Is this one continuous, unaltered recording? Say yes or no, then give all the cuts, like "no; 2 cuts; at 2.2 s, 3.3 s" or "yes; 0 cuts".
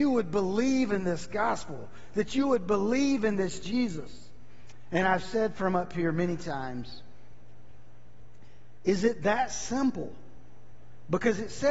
yes; 0 cuts